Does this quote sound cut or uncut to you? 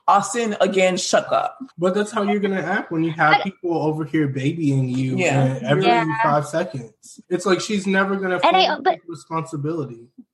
cut